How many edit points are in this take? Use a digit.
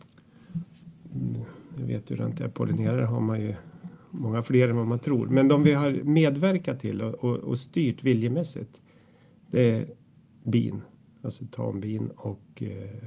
0